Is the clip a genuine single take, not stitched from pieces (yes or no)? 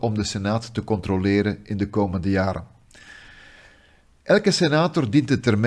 yes